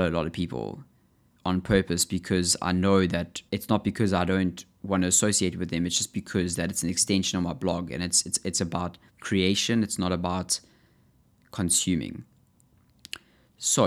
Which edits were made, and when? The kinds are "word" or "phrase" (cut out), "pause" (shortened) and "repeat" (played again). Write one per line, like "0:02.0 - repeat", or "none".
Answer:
0:03.5 - pause
0:09.1 - pause